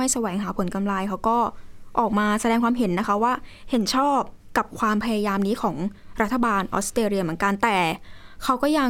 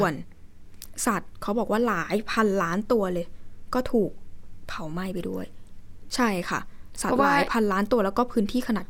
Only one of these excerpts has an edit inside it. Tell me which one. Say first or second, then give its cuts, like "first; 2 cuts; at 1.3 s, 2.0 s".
second; 1 cut; at 6.1 s